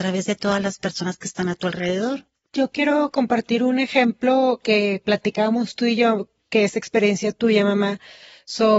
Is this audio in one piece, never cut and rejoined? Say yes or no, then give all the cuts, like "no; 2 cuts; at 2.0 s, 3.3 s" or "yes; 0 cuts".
yes; 0 cuts